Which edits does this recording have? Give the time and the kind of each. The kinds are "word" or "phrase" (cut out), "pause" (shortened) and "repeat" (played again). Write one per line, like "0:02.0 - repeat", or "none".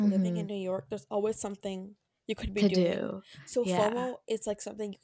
none